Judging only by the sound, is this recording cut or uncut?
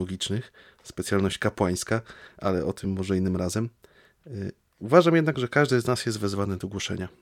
uncut